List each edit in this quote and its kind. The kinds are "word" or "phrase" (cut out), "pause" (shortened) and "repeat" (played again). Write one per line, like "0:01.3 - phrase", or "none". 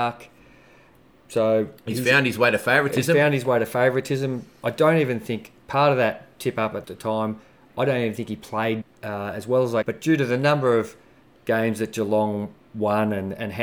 0:06.8 - phrase
0:08.8 - word
0:09.8 - phrase

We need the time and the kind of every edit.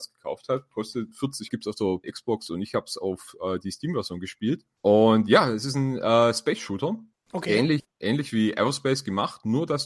0:01.5 - phrase
0:02.0 - word

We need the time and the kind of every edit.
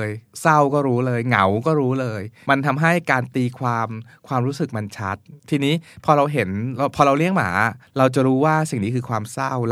0:05.4 - pause
0:07.9 - pause

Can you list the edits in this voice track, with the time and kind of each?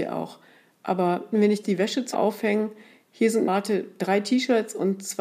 0:01.3 - word
0:01.6 - word
0:02.1 - word
0:03.5 - word

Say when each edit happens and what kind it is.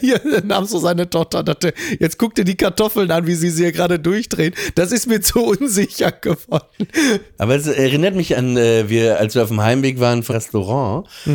0:03.4 - repeat
0:10.3 - phrase

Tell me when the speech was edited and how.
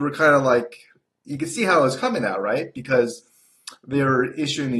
none

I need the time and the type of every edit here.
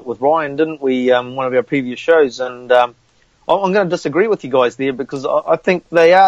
none

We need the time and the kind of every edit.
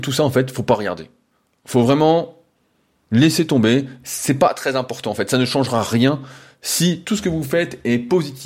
none

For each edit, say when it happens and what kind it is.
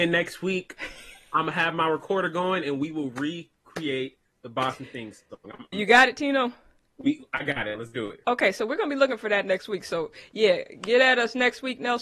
0:05.7 - word

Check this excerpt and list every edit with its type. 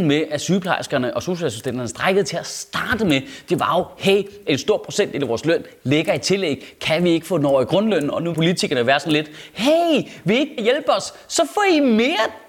0:08.3 - word
0:10.6 - word

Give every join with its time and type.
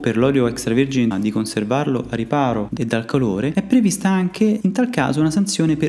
0:01.1 - word
0:02.8 - word

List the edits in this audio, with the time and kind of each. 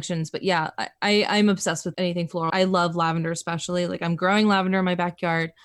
0:01.9 - word
0:02.5 - word

